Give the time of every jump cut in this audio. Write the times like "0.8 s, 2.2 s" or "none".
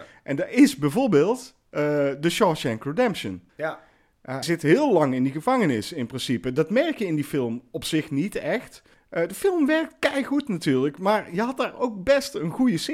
3.5 s, 4.4 s, 8.9 s